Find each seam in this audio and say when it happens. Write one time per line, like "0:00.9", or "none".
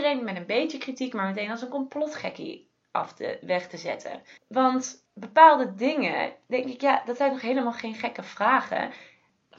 0:04.4